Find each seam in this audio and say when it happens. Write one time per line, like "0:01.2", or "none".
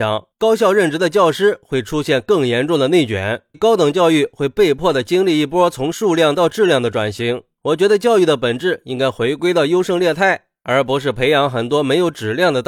0:03.5